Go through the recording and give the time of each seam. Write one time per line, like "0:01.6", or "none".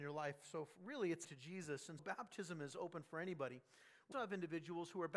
0:01.2
0:02.0
0:04.1